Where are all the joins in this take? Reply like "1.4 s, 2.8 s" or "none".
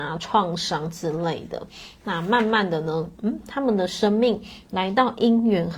none